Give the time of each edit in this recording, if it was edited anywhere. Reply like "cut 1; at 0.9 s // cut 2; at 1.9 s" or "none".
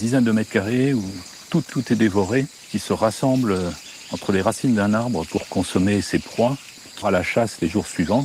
cut 1; at 1.7 s // cut 2; at 7.0 s